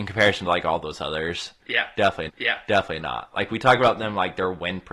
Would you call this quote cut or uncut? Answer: cut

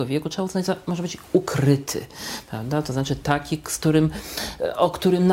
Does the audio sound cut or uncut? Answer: uncut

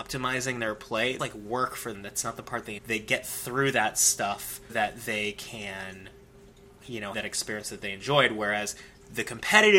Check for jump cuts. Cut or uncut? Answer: cut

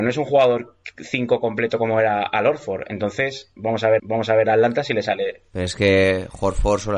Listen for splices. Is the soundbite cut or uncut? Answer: cut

